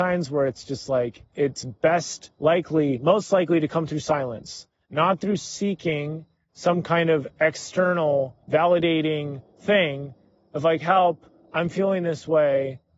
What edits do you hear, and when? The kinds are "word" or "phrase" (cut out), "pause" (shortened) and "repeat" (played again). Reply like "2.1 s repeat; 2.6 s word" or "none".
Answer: 1.3 s pause; 2.3 s pause; 8.4 s pause